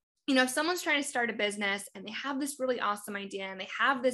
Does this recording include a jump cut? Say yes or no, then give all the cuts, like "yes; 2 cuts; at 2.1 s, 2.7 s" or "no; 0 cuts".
no; 0 cuts